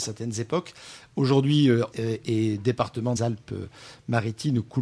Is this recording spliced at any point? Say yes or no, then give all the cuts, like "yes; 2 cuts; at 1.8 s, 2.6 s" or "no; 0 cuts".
yes; 2 cuts; at 1.9 s, 3.2 s